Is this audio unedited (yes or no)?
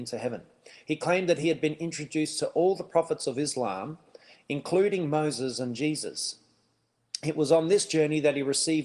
yes